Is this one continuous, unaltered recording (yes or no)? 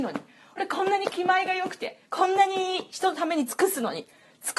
no